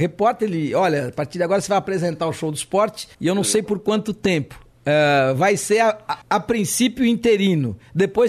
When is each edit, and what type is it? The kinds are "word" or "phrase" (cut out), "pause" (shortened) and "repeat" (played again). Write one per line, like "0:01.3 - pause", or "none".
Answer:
0:03.1 - pause
0:06.2 - pause